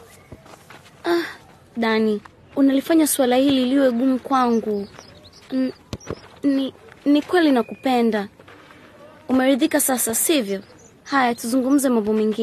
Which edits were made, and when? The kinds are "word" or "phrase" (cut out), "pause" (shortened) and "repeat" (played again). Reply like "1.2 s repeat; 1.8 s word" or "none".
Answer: none